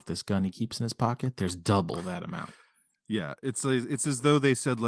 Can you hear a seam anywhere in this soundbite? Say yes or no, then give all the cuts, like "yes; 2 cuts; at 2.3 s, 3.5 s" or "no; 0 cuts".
no; 0 cuts